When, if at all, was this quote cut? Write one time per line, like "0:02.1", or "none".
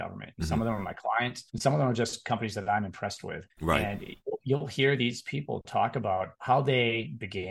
0:01.5
0:03.5
0:06.3